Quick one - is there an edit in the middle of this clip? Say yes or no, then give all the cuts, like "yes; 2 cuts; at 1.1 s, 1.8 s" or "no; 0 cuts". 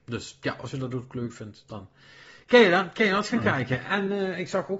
no; 0 cuts